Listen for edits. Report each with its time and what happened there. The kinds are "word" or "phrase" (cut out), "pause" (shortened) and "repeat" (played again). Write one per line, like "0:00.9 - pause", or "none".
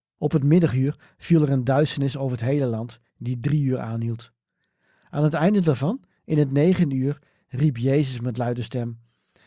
none